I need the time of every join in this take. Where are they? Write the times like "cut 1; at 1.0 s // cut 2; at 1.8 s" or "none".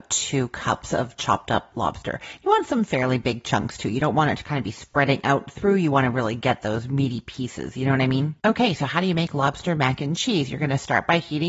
none